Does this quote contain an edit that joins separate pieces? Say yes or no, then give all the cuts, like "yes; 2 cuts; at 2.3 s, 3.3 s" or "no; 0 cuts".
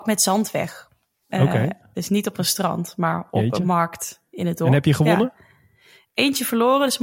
no; 0 cuts